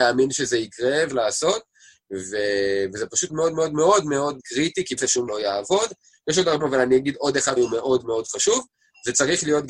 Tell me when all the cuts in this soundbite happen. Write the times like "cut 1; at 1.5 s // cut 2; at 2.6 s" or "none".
cut 1; at 1.1 s // cut 2; at 3.3 s // cut 3; at 4.4 s // cut 4; at 5.0 s // cut 5; at 5.3 s // cut 6; at 6.6 s // cut 7; at 7.6 s